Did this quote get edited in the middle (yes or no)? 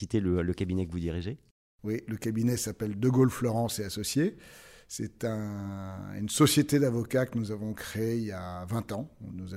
no